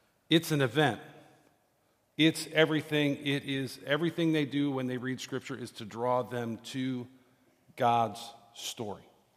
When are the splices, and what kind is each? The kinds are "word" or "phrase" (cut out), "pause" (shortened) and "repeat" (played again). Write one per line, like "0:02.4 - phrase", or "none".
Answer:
none